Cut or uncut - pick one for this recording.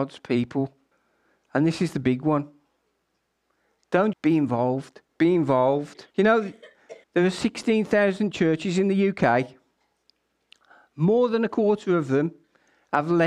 cut